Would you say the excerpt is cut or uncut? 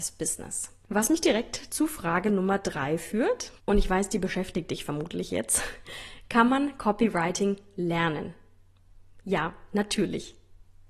cut